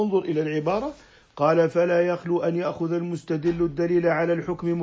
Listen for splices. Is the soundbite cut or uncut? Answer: uncut